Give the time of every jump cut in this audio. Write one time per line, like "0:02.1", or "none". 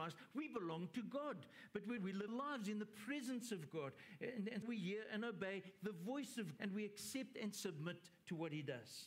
0:02.0
0:02.3
0:04.6
0:06.6